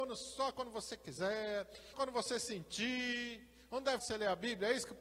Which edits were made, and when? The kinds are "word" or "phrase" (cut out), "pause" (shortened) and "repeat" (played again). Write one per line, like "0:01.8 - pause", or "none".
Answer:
0:01.9 - word
0:04.0 - word